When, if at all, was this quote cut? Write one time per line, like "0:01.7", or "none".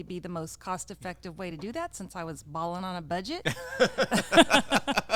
none